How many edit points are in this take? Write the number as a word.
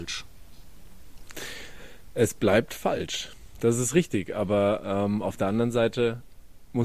zero